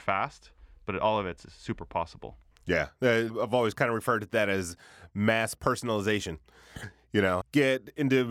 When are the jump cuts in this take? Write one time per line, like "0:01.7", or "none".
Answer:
0:02.5
0:07.4